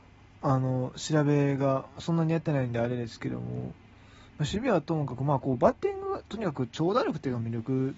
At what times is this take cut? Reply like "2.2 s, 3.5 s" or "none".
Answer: none